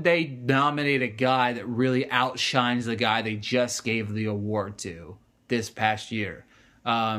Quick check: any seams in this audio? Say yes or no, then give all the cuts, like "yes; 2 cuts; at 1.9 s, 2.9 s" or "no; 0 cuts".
no; 0 cuts